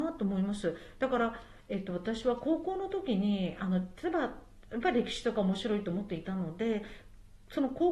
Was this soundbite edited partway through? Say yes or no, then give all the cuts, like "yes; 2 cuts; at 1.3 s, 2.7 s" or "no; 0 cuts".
yes; 1 cut; at 4.7 s